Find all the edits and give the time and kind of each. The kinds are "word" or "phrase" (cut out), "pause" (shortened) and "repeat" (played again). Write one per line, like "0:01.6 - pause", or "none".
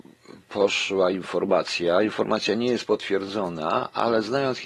none

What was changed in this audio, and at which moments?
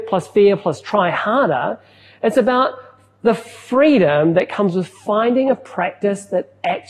none

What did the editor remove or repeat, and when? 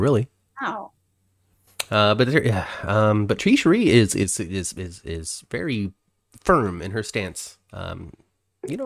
none

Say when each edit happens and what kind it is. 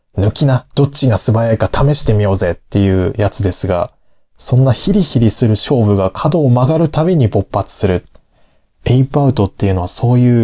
none

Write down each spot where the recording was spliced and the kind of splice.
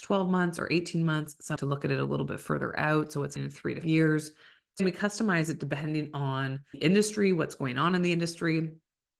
0:01.6 - word
0:03.4 - word
0:03.8 - word
0:04.8 - word
0:06.7 - word

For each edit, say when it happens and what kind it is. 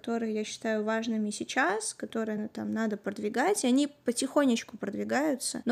none

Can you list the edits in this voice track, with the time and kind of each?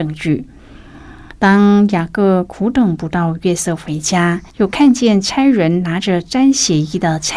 0:04.5 - pause

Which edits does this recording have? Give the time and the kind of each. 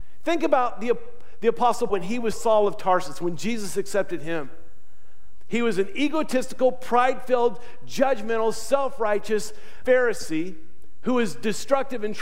0:01.9 - word
0:02.3 - word
0:09.8 - word

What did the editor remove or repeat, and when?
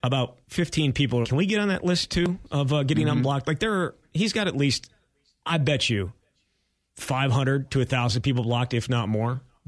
0:01.2 - word

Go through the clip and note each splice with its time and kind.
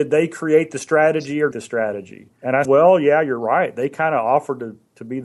0:01.5 - phrase
0:02.3 - pause
0:02.6 - word

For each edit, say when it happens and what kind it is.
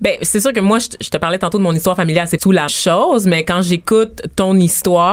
0:02.4 - phrase
0:02.7 - word

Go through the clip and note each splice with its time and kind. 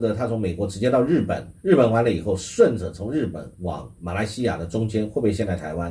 0:01.6 - pause
0:03.5 - pause

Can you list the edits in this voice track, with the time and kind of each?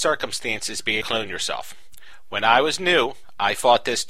0:01.0 - phrase

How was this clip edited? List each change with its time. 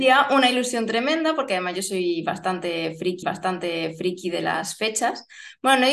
0:03.2 - repeat

